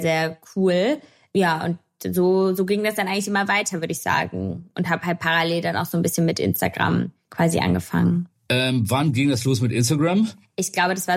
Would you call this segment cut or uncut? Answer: uncut